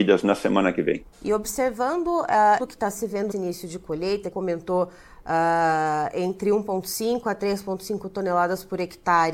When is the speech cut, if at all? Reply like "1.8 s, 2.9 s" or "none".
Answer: 1.1 s, 2.6 s, 3.3 s, 4.3 s